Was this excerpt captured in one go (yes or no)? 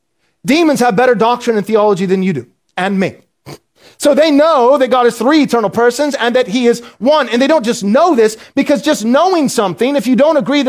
yes